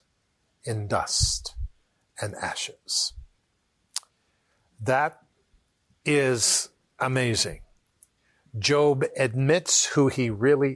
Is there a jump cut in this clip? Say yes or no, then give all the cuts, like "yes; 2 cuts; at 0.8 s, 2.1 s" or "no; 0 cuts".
no; 0 cuts